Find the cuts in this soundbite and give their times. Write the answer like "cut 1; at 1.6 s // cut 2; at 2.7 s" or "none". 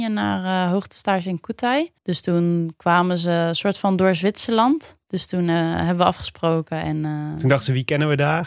cut 1; at 2.0 s // cut 2; at 5.0 s